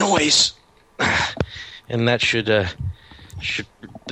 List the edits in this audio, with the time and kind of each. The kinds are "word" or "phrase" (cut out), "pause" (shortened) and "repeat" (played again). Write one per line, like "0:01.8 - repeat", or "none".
none